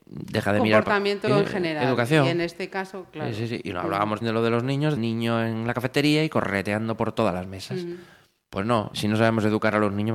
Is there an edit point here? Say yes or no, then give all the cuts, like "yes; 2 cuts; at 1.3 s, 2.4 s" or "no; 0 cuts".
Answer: yes; 4 cuts; at 1.3 s, 4.2 s, 5.0 s, 8.9 s